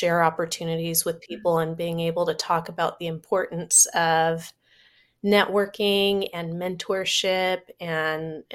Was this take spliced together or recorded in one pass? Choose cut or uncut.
uncut